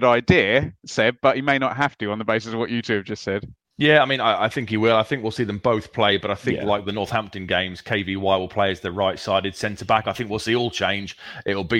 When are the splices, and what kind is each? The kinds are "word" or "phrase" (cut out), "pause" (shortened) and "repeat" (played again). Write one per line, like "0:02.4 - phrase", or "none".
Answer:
0:03.6 - pause